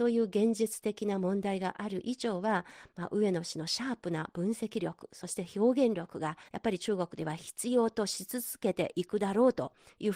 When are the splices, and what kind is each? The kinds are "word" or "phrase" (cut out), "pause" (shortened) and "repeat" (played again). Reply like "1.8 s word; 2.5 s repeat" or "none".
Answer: 6.5 s pause